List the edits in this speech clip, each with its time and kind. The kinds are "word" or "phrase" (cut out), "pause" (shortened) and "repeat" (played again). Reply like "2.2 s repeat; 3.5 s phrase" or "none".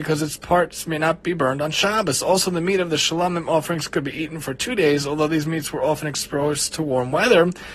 none